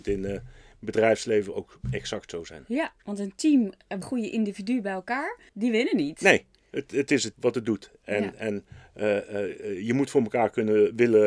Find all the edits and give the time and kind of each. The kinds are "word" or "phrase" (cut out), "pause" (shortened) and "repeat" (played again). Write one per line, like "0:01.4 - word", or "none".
0:03.0 - pause
0:04.0 - phrase
0:05.5 - pause
0:07.3 - word

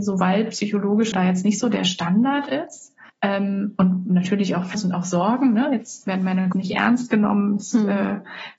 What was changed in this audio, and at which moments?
0:01.1 - word
0:03.1 - pause
0:04.7 - phrase
0:06.5 - word

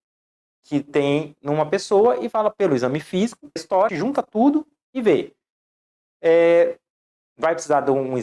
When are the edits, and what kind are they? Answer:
0:03.6 - word
0:03.9 - phrase

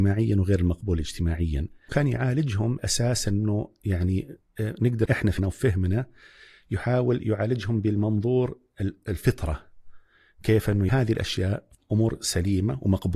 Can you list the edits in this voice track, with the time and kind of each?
0:01.9 - word
0:02.8 - word
0:05.1 - word
0:05.4 - word
0:10.9 - word
0:11.7 - word

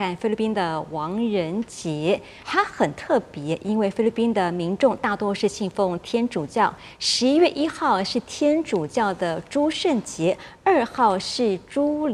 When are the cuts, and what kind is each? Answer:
0:02.4 - pause

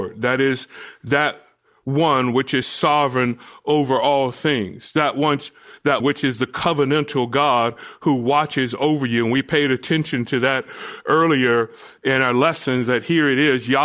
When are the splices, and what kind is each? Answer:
0:06.0 - word

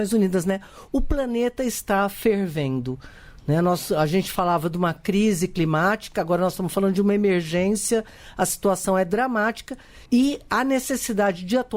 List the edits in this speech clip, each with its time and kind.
0:10.1 - pause

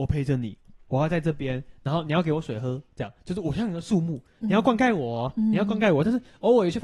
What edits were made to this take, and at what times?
none

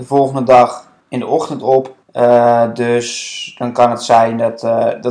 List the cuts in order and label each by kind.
0:01.0 - pause
0:02.0 - pause

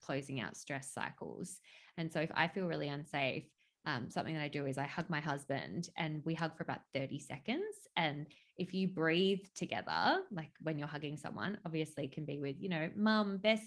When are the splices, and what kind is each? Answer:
none

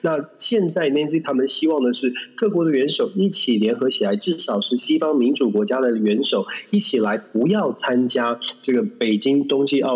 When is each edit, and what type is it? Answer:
0:01.2 - word

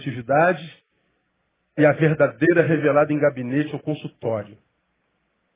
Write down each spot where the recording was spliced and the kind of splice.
none

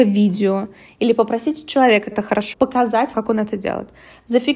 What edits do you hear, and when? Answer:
0:02.1 - word
0:02.5 - word
0:03.1 - word

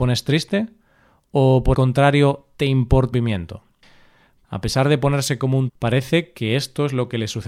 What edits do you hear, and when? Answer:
0:01.7 - word
0:03.1 - word
0:05.7 - word

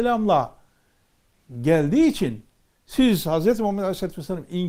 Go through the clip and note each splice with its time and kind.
none

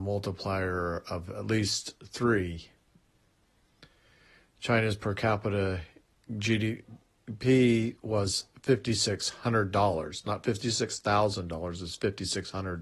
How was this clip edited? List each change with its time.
none

